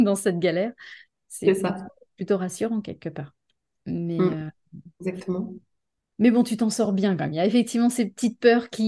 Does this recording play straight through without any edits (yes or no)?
yes